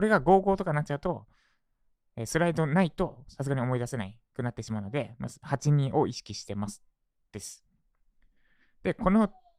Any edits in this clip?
yes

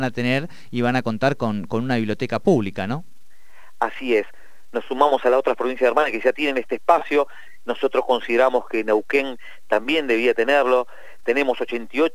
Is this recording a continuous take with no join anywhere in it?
yes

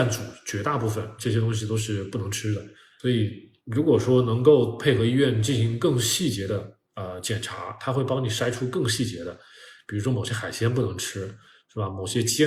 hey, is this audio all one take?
yes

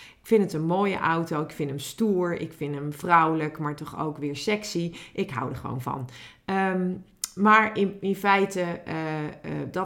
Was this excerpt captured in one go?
yes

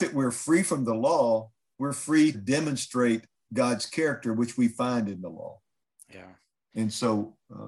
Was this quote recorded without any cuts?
no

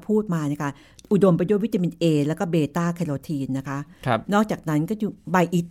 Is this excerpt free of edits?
yes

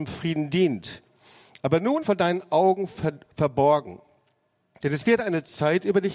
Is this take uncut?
no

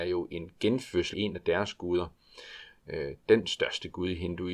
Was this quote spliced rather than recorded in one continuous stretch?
yes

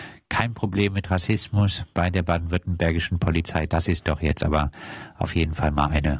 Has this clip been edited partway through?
no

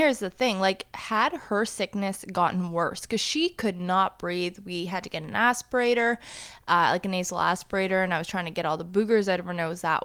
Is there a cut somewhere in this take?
no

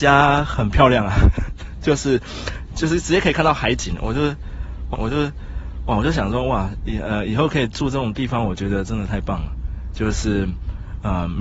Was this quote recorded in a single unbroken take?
no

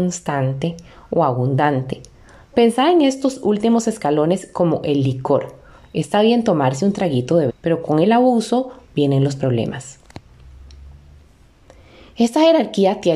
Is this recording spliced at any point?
yes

